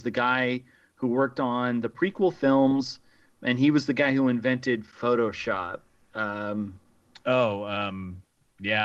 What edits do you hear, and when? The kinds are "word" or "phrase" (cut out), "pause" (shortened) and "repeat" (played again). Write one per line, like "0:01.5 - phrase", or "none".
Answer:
none

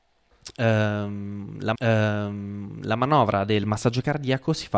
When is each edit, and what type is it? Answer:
0:01.7 - repeat

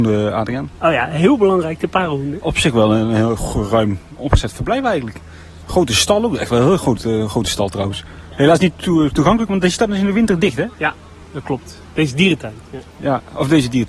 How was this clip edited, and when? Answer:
0:10.7 - pause

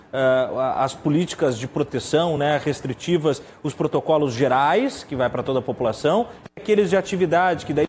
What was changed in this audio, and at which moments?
none

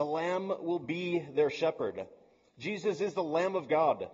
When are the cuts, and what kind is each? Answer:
none

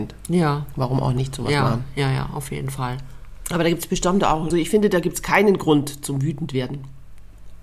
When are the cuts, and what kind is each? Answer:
0:04.5 - word

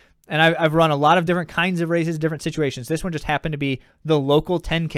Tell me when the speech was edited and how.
none

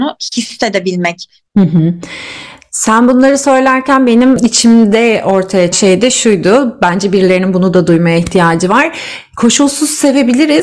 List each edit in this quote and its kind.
0:01.5 - pause
0:05.7 - word

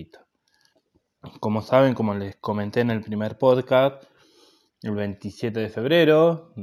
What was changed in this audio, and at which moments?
none

